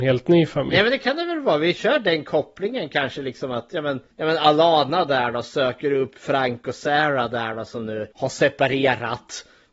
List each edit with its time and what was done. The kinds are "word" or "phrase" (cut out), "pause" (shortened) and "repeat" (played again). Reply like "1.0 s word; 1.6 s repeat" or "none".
4.1 s pause; 6.2 s word; 8.1 s pause